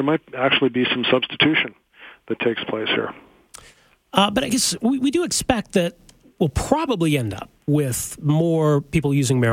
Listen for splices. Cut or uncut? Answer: uncut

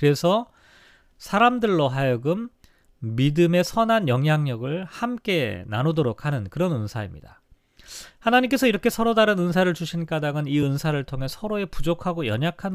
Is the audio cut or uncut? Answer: uncut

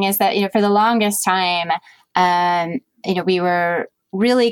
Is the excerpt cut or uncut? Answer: uncut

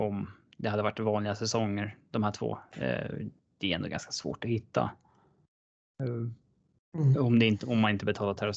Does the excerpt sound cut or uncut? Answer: uncut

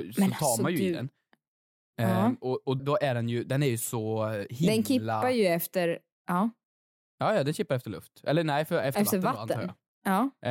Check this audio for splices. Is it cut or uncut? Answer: cut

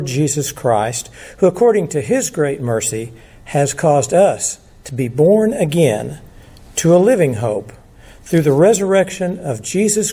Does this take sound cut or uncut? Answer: uncut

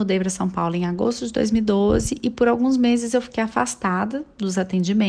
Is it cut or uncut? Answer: uncut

